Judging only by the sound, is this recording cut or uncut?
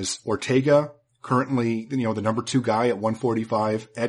uncut